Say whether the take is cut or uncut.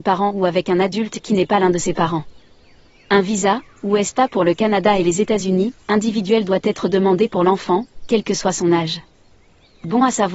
uncut